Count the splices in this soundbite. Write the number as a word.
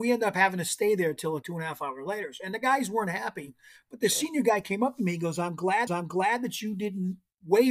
two